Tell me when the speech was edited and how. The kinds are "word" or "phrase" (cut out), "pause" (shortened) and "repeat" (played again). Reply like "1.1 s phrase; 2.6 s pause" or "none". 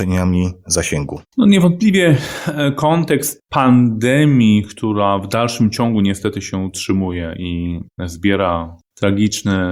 1.3 s pause

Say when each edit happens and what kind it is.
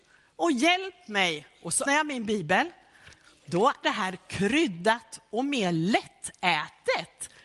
1.9 s word; 3.8 s word

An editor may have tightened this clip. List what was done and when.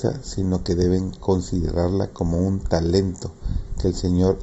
none

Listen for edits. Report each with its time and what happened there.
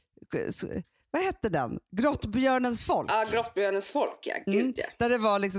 none

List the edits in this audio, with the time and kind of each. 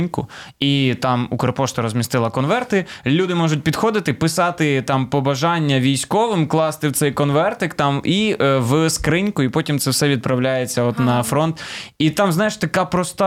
none

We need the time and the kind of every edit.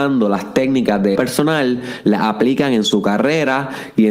1.2 s word

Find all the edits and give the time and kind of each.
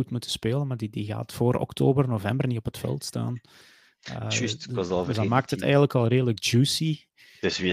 none

